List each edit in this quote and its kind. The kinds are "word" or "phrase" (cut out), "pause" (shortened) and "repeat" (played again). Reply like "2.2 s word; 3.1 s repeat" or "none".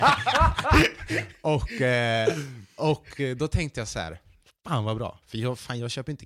none